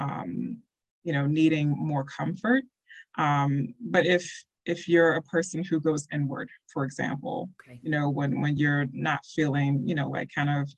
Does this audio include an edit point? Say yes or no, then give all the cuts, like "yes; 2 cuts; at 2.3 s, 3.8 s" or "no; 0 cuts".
no; 0 cuts